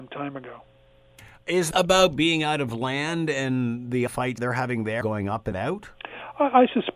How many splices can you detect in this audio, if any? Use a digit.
6